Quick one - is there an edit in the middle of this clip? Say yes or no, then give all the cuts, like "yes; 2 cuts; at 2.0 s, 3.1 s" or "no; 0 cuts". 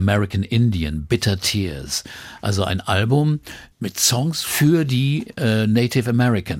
no; 0 cuts